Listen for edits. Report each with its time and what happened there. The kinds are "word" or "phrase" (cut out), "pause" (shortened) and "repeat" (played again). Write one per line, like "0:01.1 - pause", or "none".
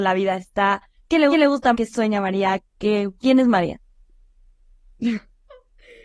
0:01.0 - pause
0:01.3 - repeat
0:01.7 - word
0:03.2 - pause